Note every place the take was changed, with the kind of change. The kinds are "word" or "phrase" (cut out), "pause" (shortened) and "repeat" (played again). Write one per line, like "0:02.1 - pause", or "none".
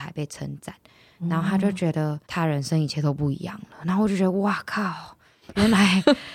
0:02.2 - pause